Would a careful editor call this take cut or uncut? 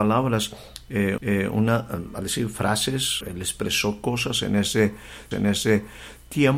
cut